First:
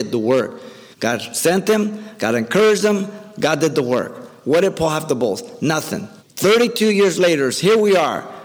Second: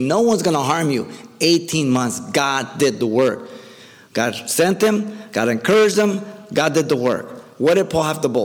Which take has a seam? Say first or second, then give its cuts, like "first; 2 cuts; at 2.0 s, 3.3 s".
first; 2 cuts; at 0.9 s, 6.2 s